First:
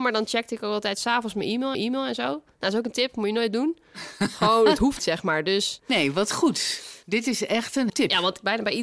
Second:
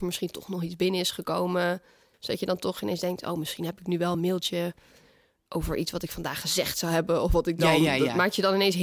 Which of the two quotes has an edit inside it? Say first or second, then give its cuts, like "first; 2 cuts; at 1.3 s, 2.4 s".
first; 3 cuts; at 1.7 s, 5.0 s, 7.9 s